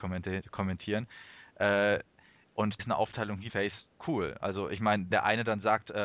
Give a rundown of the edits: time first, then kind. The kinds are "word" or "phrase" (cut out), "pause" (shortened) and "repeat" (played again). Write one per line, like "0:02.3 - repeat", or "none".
0:02.8 - word
0:03.5 - word
0:04.0 - word
0:05.1 - word